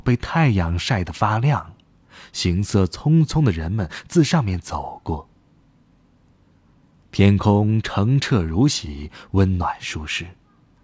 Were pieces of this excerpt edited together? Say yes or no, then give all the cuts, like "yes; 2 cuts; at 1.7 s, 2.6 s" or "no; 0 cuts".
no; 0 cuts